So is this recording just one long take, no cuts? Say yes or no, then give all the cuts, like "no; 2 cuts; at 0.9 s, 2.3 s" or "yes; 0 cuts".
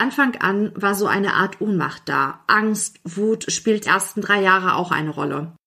no; 1 cut; at 3.8 s